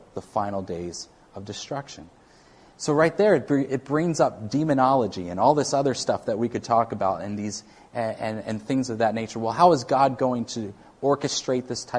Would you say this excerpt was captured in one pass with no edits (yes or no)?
yes